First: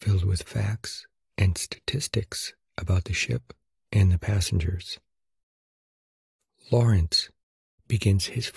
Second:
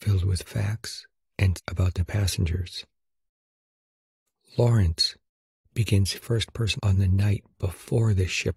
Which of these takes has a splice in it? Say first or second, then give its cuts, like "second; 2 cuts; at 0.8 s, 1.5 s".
second; 4 cuts; at 1.6 s, 2.0 s, 6.1 s, 6.8 s